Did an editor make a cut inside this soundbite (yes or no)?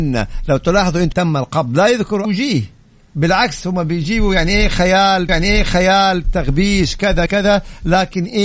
yes